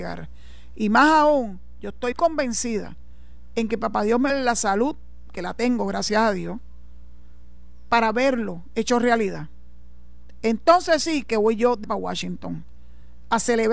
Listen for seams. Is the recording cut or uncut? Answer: cut